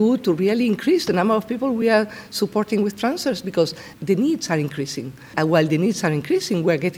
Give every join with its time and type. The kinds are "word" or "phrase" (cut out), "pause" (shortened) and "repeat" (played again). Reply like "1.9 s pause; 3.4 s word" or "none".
none